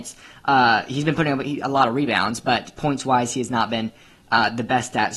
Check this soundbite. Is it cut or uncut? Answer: uncut